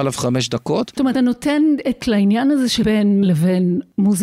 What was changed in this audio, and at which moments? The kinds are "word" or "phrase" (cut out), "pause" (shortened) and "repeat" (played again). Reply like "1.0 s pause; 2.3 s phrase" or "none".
1.1 s word; 2.0 s word; 2.8 s word; 3.2 s word